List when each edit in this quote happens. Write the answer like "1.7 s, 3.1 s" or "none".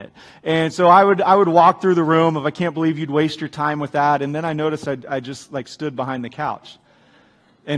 none

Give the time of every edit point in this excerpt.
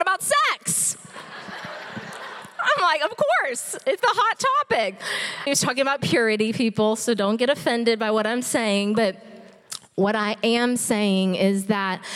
4.0 s, 5.5 s

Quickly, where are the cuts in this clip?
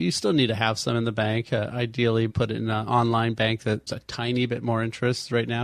2.3 s, 3.9 s

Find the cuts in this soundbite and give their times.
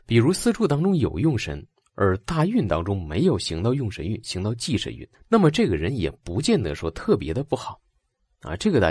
5.1 s

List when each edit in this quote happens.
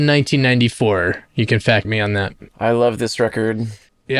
1.8 s, 2.5 s

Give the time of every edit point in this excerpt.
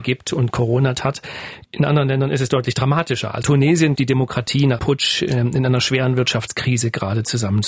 1.0 s, 1.6 s, 3.4 s, 4.0 s, 4.8 s

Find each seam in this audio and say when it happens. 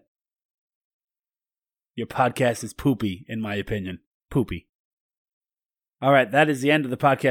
4.1 s

